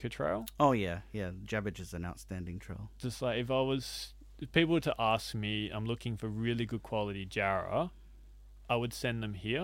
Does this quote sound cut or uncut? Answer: uncut